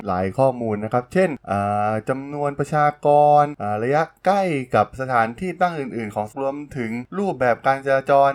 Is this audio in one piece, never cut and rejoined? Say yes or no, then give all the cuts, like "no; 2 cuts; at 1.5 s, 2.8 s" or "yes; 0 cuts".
no; 1 cut; at 6.3 s